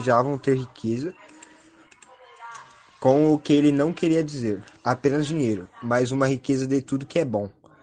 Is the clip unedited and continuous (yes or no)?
yes